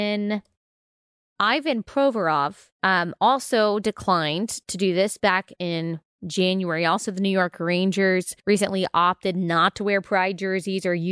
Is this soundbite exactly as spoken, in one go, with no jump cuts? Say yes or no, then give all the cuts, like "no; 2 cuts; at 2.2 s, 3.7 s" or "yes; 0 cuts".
no; 2 cuts; at 2.7 s, 8.4 s